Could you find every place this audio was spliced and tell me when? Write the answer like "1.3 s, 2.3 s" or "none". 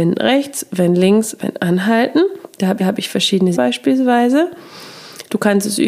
1.4 s, 2.8 s, 3.5 s